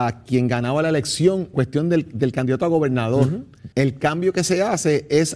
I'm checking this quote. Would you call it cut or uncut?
cut